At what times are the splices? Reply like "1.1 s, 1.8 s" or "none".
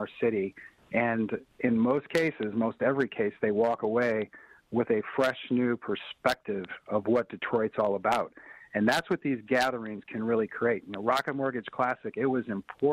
1.5 s